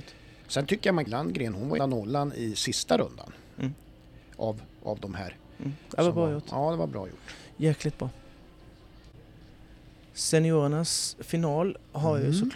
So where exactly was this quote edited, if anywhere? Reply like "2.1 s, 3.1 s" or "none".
1.1 s, 1.8 s